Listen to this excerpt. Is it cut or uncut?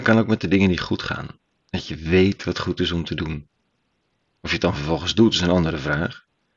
uncut